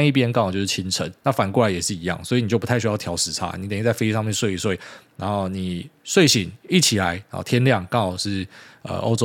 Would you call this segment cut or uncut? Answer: uncut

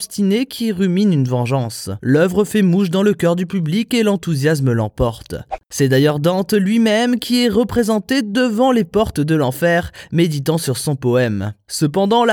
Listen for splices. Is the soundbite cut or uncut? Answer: uncut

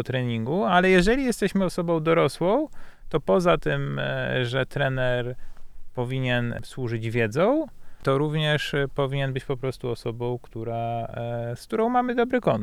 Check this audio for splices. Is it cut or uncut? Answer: uncut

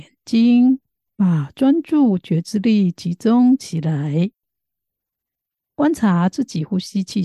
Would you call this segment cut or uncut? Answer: uncut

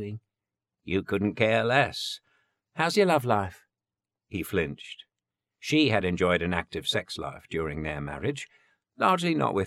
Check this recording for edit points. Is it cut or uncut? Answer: uncut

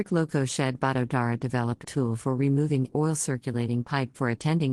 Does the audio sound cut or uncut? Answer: cut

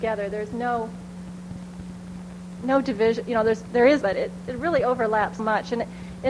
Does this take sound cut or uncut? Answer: cut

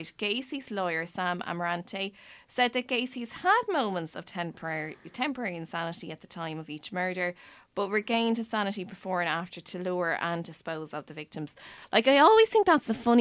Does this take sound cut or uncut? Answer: uncut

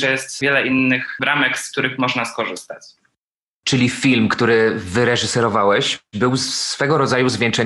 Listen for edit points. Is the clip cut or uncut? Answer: uncut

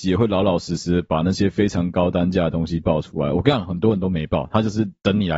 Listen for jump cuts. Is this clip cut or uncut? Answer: uncut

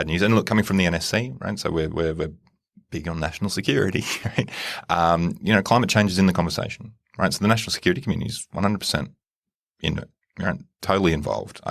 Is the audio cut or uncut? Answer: uncut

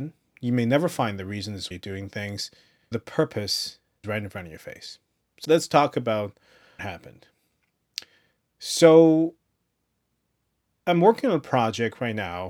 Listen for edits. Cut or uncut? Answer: cut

